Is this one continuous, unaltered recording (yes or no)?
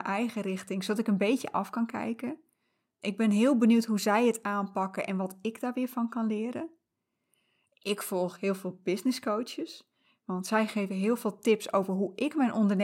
yes